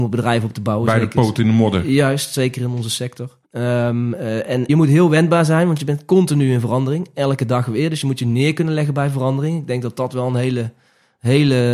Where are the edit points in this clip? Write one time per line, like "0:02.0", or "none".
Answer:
0:03.4
0:04.7